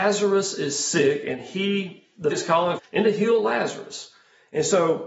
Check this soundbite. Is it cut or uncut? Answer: cut